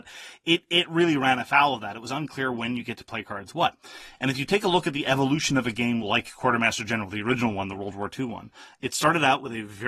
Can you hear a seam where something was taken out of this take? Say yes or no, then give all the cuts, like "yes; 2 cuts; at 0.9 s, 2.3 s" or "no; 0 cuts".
no; 0 cuts